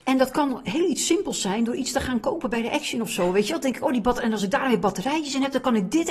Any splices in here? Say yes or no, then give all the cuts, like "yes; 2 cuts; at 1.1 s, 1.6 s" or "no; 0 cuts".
no; 0 cuts